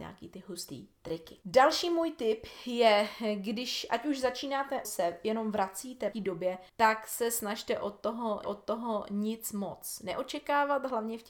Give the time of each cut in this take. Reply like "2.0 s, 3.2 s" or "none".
1.4 s, 4.8 s, 6.1 s, 6.7 s, 8.4 s